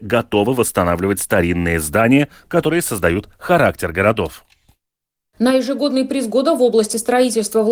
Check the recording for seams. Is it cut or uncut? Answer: uncut